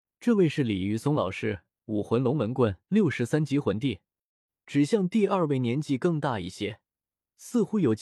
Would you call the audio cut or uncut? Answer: cut